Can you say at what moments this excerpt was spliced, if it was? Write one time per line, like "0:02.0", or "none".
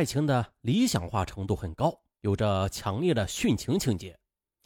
0:02.1